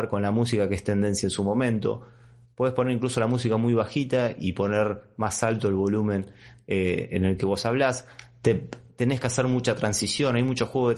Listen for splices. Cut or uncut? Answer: uncut